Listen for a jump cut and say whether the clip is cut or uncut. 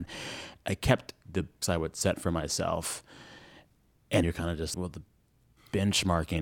cut